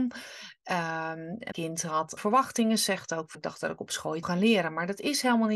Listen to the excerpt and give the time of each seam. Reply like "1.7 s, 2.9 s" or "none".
1.5 s, 2.2 s, 3.3 s, 4.2 s